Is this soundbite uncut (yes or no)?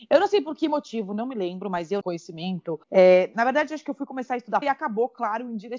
no